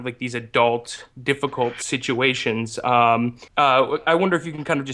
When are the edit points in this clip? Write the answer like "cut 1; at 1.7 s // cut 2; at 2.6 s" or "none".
cut 1; at 1.1 s // cut 2; at 3.5 s

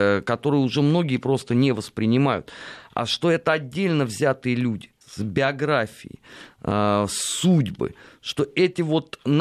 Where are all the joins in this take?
cut 1; at 5.0 s

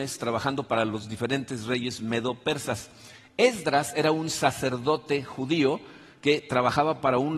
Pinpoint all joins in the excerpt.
none

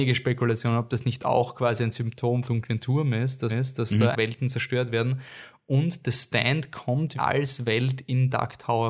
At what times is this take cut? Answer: cut 1; at 2.5 s // cut 2; at 3.5 s // cut 3; at 4.1 s // cut 4; at 7.2 s

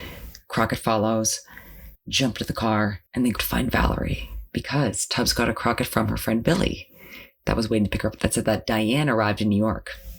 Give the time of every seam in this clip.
cut 1; at 1.9 s // cut 2; at 3.1 s // cut 3; at 3.4 s // cut 4; at 8.2 s

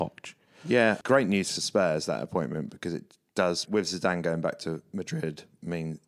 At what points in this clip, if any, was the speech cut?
cut 1; at 1.0 s // cut 2; at 3.7 s

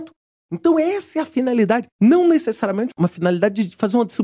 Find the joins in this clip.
cut 1; at 1.9 s

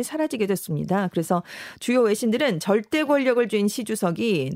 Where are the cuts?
none

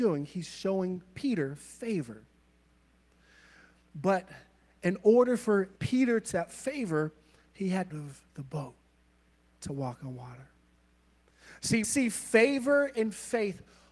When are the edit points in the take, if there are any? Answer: cut 1; at 5.8 s // cut 2; at 6.3 s // cut 3; at 7.9 s // cut 4; at 8.3 s // cut 5; at 11.8 s

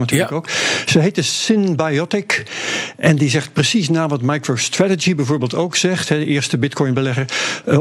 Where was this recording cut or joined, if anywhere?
none

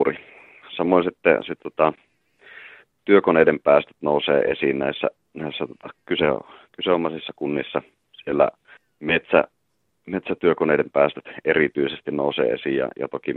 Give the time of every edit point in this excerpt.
cut 1; at 8.8 s

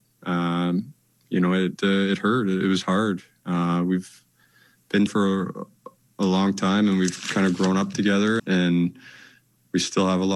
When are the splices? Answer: cut 1; at 1.8 s // cut 2; at 2.6 s // cut 3; at 5.1 s // cut 4; at 8.4 s

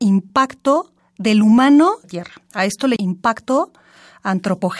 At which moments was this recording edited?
cut 1; at 1.0 s // cut 2; at 2.0 s // cut 3; at 3.0 s

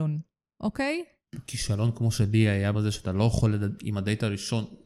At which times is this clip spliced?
cut 1; at 2.7 s // cut 2; at 3.8 s

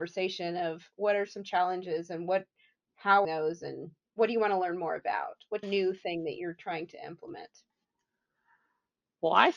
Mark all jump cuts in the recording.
cut 1; at 3.2 s // cut 2; at 4.0 s // cut 3; at 5.6 s

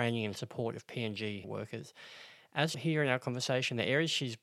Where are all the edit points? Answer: cut 1; at 1.4 s // cut 2; at 2.7 s

